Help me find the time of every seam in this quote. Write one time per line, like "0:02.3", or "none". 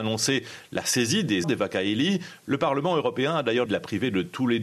0:01.4
0:03.7